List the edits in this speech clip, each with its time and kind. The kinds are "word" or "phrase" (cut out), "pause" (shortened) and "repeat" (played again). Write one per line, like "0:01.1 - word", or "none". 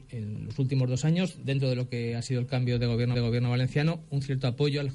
0:03.1 - repeat